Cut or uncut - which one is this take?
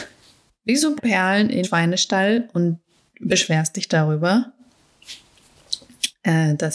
cut